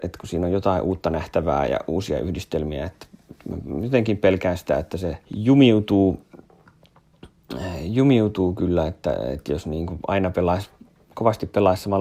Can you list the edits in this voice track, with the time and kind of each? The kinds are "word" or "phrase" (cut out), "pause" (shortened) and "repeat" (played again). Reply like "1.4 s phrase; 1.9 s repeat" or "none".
5.2 s pause